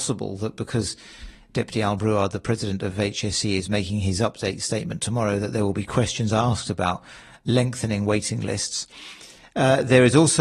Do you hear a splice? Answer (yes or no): no